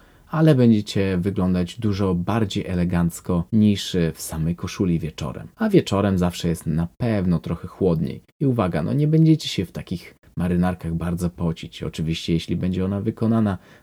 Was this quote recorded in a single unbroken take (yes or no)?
no